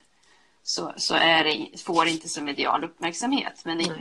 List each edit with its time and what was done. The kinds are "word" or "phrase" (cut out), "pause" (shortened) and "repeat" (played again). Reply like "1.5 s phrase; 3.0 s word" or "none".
none